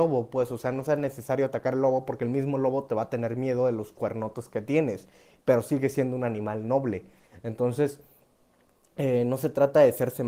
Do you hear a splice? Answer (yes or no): no